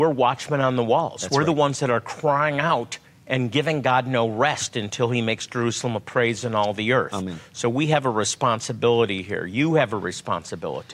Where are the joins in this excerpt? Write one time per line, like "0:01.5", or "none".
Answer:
0:03.0